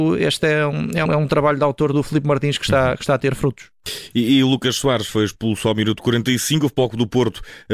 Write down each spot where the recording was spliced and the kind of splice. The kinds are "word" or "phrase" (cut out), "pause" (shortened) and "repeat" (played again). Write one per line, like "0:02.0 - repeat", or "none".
0:01.1 - word
0:01.9 - word